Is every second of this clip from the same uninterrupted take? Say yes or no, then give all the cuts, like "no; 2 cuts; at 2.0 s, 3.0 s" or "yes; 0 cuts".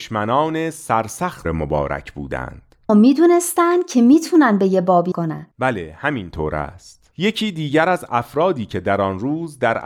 no; 5 cuts; at 1.4 s, 2.9 s, 5.1 s, 5.5 s, 7.1 s